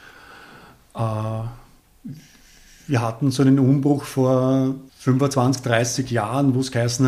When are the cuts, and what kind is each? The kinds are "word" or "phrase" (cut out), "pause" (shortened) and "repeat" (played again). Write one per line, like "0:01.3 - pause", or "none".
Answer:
0:04.9 - pause